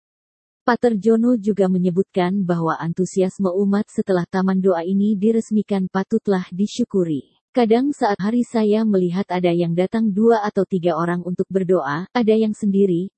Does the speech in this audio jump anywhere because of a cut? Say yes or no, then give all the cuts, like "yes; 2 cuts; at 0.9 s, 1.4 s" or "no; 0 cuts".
yes; 2 cuts; at 7.5 s, 8.2 s